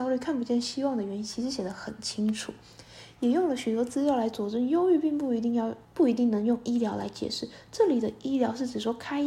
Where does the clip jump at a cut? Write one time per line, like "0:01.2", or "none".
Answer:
0:05.8